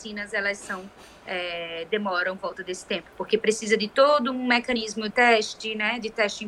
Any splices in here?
yes; 2 cuts; at 2.4 s, 5.1 s

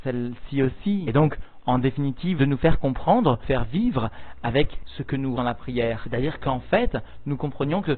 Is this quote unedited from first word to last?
no; 3 cuts; at 2.4 s, 3.4 s, 5.4 s

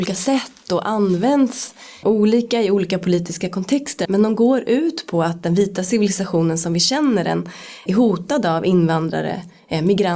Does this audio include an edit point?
yes; 3 cuts; at 2.0 s, 4.0 s, 7.9 s

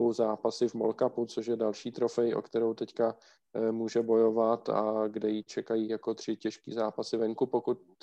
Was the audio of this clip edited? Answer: no; 0 cuts

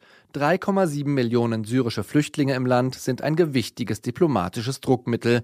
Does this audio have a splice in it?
no; 0 cuts

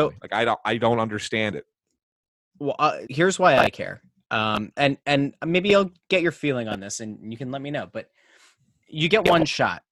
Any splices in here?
yes; 1 cut; at 3.1 s

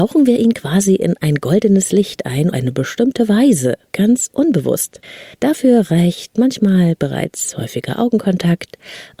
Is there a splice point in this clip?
yes; 3 cuts; at 2.5 s, 3.9 s, 5.3 s

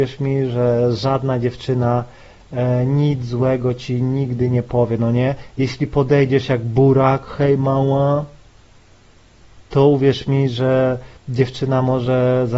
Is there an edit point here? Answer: yes; 2 cuts; at 9.7 s, 11.2 s

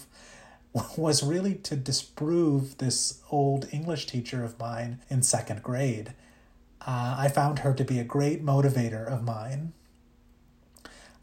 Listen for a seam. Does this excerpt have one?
yes; 1 cut; at 5.0 s

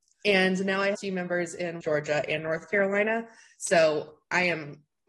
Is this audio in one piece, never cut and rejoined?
no; 2 cuts; at 0.9 s, 1.8 s

